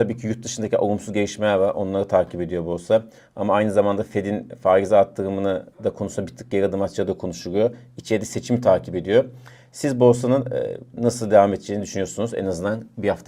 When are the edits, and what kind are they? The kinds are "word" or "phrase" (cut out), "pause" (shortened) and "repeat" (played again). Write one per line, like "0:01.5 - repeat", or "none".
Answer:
0:05.7 - pause